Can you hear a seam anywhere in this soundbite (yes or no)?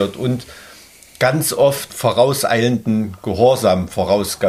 yes